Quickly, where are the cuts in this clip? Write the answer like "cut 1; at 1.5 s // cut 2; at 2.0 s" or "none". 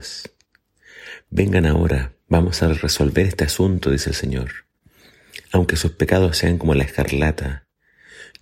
cut 1; at 2.2 s